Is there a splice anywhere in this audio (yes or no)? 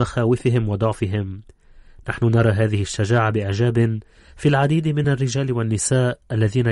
no